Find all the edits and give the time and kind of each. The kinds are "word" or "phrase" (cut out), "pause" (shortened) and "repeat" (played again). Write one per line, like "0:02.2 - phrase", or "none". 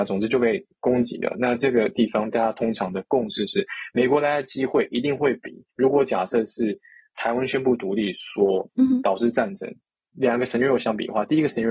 0:05.7 - pause